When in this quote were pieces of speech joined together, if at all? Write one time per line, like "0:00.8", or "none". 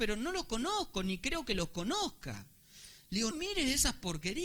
0:03.3